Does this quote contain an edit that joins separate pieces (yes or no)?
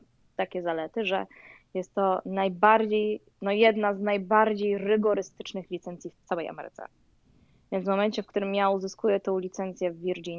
no